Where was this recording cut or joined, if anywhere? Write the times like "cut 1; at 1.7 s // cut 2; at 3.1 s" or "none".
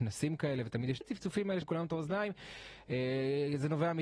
cut 1; at 1.0 s // cut 2; at 1.6 s